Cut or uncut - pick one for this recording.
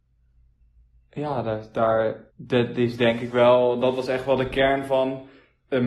cut